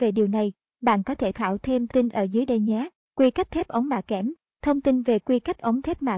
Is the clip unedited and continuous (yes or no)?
no